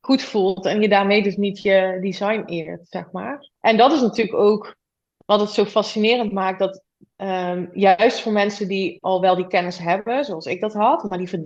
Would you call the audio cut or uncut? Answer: cut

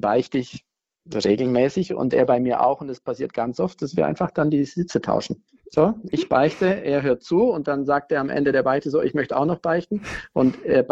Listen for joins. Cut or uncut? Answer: cut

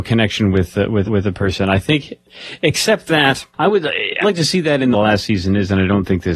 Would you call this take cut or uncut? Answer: cut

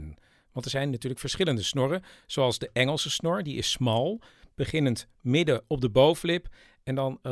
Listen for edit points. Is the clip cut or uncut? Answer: uncut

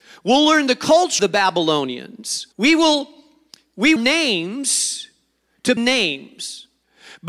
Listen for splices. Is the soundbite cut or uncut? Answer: cut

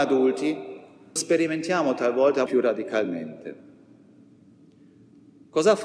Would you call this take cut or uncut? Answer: cut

